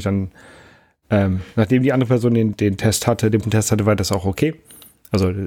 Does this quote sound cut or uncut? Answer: cut